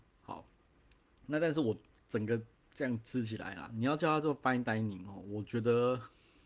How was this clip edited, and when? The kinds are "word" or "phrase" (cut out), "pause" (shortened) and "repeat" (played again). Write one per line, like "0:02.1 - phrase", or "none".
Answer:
none